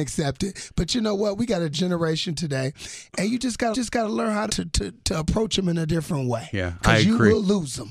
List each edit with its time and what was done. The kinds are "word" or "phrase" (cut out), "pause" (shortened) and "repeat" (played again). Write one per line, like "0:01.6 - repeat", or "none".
0:01.7 - word
0:03.7 - repeat
0:04.5 - word